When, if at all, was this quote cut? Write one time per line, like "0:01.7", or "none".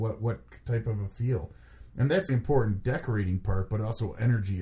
0:02.3